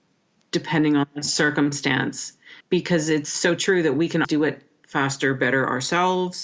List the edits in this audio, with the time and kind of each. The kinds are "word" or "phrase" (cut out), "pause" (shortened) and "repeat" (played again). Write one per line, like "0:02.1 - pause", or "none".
0:02.6 - pause
0:04.2 - word